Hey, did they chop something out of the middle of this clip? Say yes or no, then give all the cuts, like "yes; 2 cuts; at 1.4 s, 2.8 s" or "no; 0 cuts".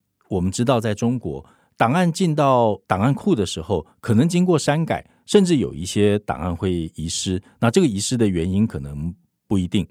no; 0 cuts